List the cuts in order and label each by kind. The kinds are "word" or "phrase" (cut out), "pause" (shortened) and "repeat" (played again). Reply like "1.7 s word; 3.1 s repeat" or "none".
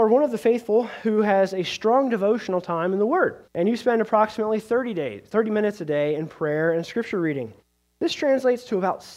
3.5 s pause